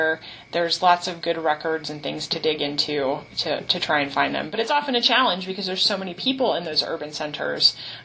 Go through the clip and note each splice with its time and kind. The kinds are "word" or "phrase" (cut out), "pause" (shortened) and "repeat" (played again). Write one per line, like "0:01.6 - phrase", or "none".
none